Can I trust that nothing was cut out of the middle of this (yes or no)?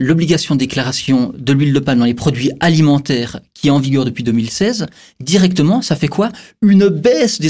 yes